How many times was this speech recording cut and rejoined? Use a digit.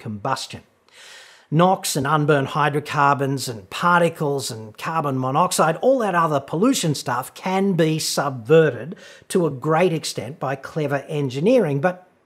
0